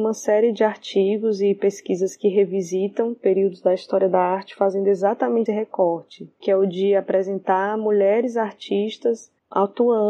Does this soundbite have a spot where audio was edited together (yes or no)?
yes